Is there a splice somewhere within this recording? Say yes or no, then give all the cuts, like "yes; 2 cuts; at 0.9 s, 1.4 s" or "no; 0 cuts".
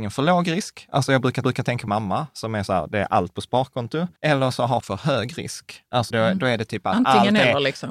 yes; 5 cuts; at 1.4 s, 1.9 s, 4.2 s, 4.8 s, 6.1 s